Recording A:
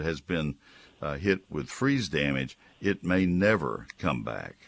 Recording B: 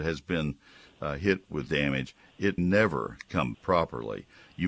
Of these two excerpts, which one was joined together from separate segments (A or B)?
B